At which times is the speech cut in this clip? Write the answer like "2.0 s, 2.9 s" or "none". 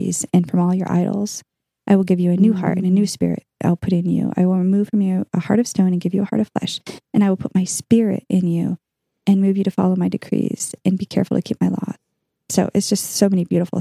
none